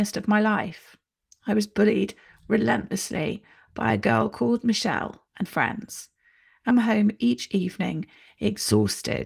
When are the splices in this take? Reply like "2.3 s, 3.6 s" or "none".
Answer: 5.5 s, 6.7 s